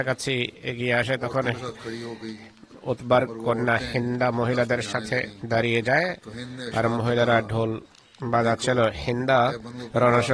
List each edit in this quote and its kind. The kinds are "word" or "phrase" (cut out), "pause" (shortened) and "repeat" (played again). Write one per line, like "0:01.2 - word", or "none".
none

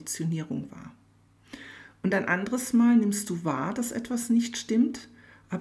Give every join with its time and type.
none

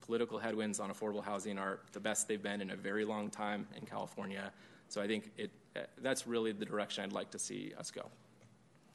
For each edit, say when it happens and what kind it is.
none

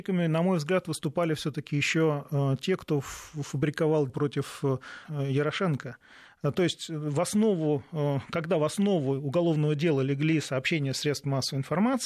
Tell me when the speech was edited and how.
0:04.1 - word
0:05.0 - phrase

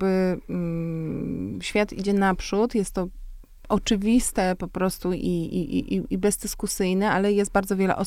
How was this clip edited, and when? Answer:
none

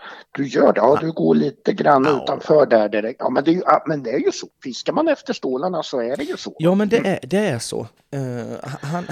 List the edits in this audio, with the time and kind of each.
none

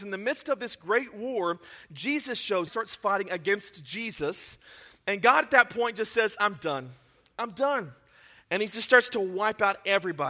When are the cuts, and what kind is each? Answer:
0:02.7 - phrase

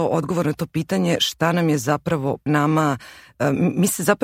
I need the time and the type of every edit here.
0:02.5 - phrase

